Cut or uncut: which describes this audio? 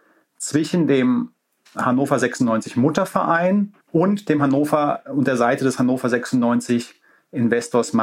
cut